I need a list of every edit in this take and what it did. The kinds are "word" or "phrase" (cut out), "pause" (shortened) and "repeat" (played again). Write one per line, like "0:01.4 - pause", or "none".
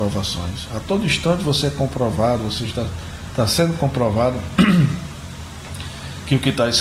none